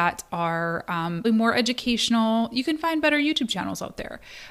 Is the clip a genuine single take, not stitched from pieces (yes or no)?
no